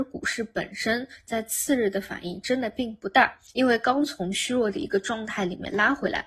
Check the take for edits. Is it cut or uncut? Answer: uncut